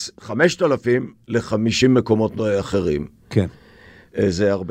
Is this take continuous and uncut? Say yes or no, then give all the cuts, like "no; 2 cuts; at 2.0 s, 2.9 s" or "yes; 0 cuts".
yes; 0 cuts